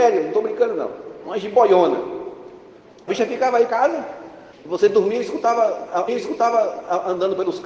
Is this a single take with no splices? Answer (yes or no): no